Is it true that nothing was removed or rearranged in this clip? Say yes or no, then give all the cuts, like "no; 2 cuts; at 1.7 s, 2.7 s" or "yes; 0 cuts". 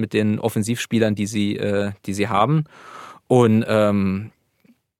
yes; 0 cuts